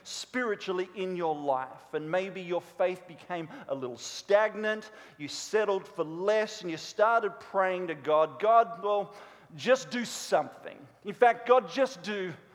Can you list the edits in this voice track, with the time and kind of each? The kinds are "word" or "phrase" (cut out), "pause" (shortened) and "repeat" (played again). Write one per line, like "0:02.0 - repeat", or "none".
none

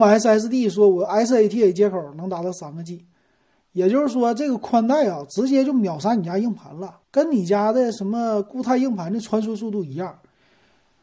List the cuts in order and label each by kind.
0:07.0 - pause

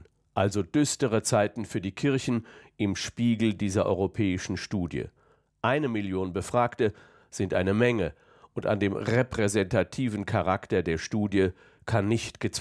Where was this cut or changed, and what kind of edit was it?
none

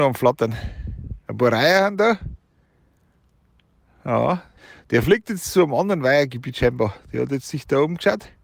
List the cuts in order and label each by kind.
0:01.2 - pause
0:04.6 - pause

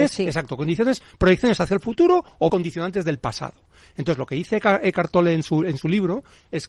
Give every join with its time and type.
0:02.5 - word

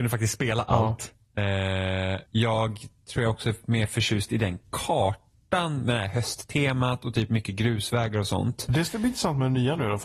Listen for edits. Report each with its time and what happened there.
0:02.3 - pause

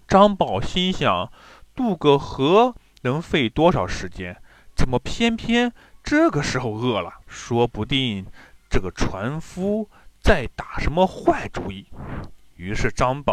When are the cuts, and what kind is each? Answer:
0:07.2 - pause

